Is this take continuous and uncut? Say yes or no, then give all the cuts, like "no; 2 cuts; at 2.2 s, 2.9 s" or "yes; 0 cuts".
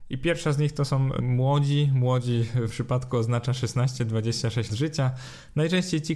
no; 3 cuts; at 1.2 s, 2.7 s, 4.7 s